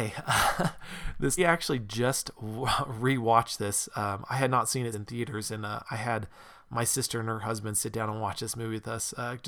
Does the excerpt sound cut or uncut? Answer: cut